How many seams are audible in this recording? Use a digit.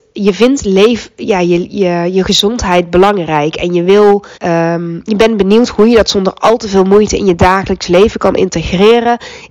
1